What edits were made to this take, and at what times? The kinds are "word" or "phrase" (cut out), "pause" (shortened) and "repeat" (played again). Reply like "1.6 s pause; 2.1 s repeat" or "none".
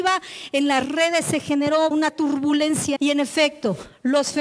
1.9 s word; 3.0 s word